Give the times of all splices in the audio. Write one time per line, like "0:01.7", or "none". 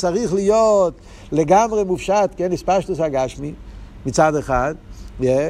none